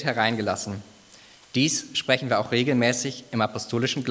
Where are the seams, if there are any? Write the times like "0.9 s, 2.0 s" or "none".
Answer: none